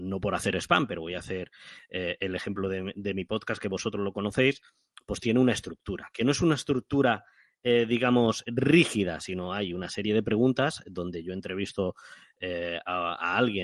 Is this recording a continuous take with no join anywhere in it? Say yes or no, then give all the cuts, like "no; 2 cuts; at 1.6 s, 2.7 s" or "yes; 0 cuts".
yes; 0 cuts